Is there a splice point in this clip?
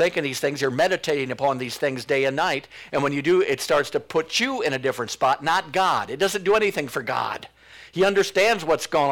no; 0 cuts

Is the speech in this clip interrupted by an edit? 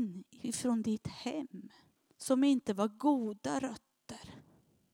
yes; 1 cut; at 2.0 s

